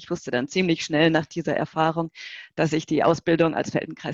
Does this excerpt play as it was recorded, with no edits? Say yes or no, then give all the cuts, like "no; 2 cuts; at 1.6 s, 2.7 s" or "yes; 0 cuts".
yes; 0 cuts